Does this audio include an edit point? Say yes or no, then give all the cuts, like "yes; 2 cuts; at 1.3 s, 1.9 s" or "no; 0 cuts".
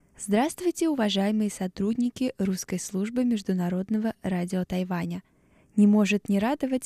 no; 0 cuts